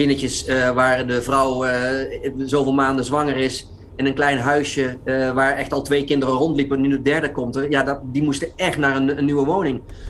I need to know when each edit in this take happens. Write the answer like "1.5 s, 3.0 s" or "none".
none